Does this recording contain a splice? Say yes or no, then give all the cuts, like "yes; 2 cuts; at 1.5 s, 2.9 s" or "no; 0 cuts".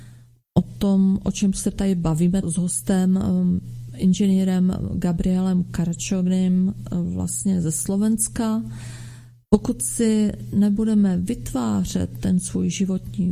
yes; 1 cut; at 2.4 s